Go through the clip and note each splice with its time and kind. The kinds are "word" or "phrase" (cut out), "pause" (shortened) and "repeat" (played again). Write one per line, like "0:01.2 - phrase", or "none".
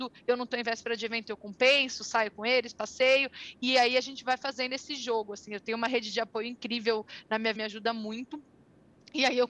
0:07.5 - phrase